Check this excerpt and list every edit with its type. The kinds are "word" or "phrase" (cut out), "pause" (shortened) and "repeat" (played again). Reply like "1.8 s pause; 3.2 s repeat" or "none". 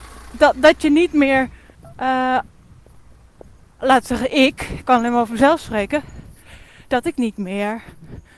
1.7 s pause